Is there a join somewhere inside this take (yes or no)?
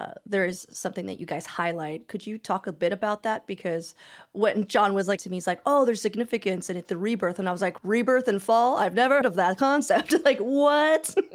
yes